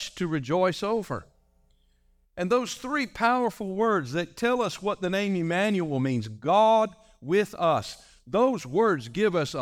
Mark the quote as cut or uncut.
uncut